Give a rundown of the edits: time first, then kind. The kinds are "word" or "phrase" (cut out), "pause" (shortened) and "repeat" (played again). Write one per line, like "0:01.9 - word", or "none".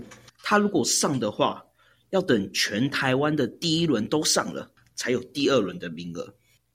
none

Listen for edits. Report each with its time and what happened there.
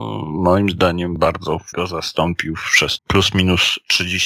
0:01.7 - word
0:03.0 - word

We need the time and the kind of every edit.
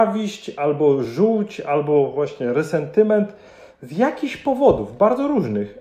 none

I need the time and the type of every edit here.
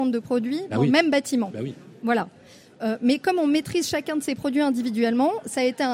none

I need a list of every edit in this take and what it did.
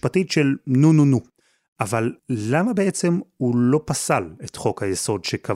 0:02.2 - pause

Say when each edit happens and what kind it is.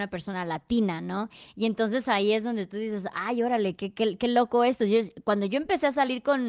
none

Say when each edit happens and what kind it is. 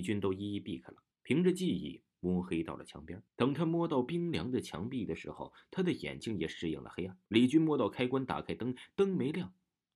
0:01.1 - pause
0:03.3 - pause
0:07.3 - pause

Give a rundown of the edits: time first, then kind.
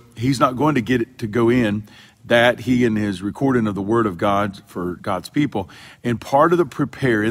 none

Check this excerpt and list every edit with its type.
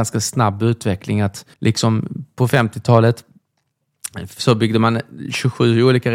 0:01.5 - pause

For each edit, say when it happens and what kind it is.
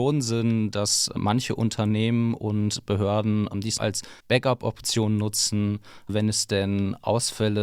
0:03.8 - word
0:04.2 - pause

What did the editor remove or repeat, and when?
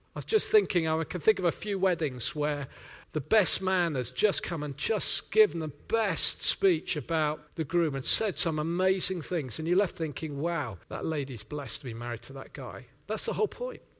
0:03.0 - pause
0:07.5 - pause
0:10.8 - pause

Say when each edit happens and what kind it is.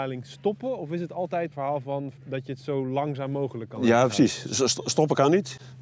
0:01.5 - word
0:02.2 - pause

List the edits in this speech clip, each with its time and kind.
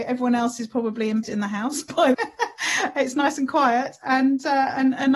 0:01.2 - word
0:02.1 - word

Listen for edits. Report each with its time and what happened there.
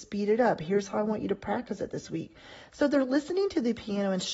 none

